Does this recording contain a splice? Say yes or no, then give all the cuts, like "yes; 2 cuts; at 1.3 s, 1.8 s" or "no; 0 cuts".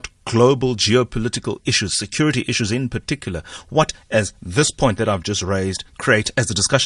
no; 0 cuts